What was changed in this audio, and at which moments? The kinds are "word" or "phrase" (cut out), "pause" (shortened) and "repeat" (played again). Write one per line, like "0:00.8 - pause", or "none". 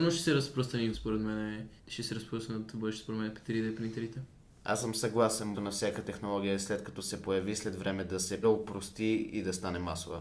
0:00.9 - word
0:01.8 - pause
0:05.5 - word
0:08.4 - word